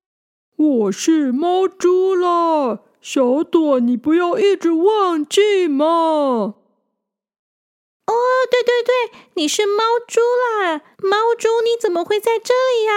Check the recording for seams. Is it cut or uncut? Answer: cut